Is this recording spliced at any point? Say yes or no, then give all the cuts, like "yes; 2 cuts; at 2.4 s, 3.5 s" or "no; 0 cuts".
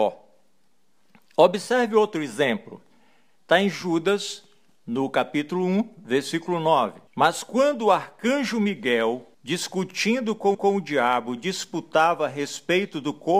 yes; 3 cuts; at 7.1 s, 9.3 s, 10.5 s